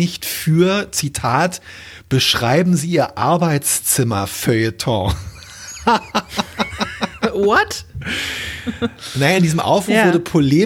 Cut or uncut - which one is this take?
uncut